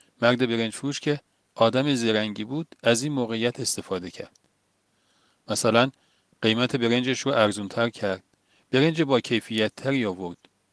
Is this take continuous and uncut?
yes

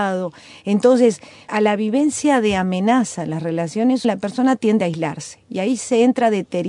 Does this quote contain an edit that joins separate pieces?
yes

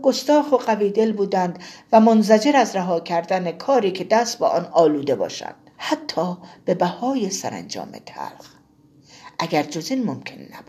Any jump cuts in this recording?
yes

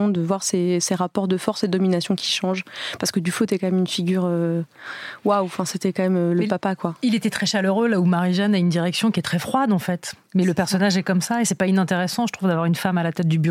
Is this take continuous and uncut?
no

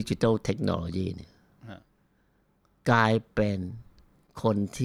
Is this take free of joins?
yes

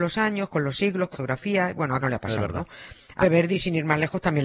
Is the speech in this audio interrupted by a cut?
yes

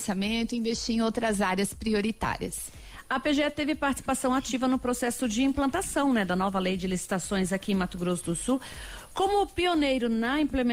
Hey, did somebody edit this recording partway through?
no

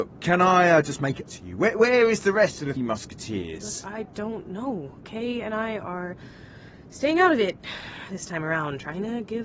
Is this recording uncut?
no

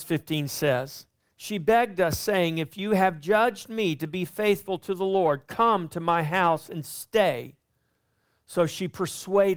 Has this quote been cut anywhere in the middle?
no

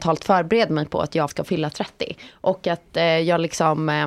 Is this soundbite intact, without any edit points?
no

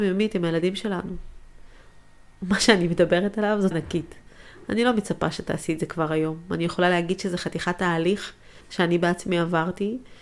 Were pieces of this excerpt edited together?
yes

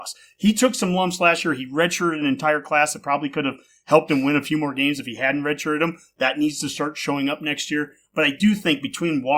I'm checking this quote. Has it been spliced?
no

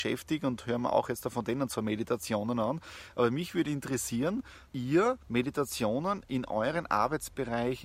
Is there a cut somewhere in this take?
yes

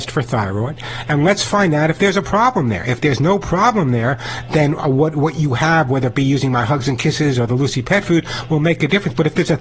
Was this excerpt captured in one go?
yes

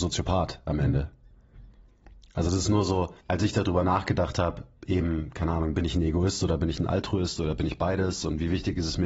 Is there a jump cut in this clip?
yes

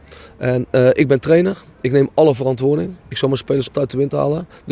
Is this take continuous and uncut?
no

